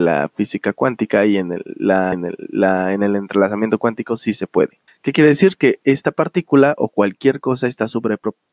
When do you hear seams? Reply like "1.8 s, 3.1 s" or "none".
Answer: 2.1 s, 4.9 s